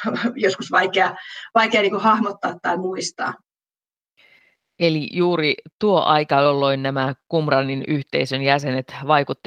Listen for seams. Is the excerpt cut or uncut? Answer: uncut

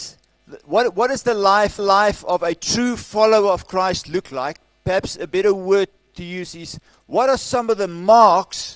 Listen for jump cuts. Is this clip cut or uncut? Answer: cut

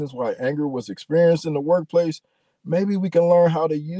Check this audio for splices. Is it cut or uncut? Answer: uncut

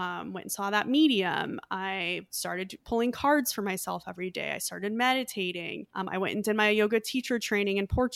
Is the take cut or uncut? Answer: cut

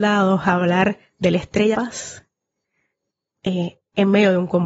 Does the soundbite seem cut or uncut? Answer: cut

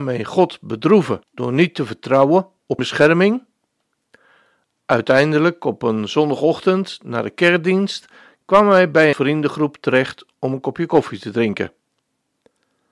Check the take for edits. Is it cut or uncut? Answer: cut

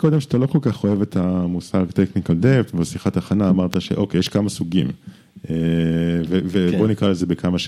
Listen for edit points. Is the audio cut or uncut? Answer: uncut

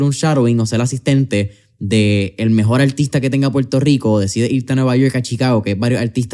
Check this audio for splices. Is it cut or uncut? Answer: uncut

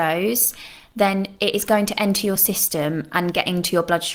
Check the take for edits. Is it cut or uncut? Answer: uncut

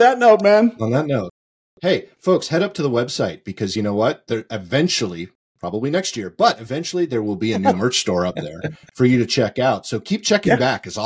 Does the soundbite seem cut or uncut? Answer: uncut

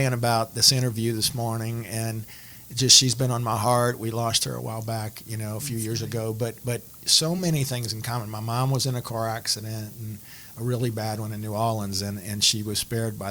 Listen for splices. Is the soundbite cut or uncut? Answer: uncut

